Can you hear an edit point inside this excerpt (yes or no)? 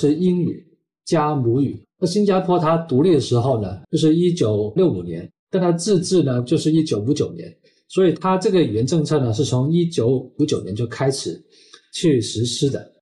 yes